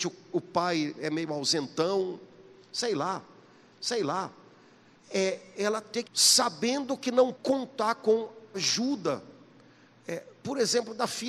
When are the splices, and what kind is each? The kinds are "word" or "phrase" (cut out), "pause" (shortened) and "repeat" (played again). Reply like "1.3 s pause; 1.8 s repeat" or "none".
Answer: 3.7 s repeat; 6.0 s phrase; 7.3 s word; 8.5 s word